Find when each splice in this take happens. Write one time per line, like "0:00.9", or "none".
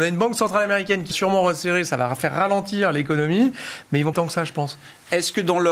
0:01.1
0:04.1